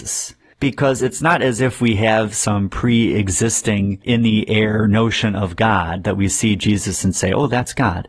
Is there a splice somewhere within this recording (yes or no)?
no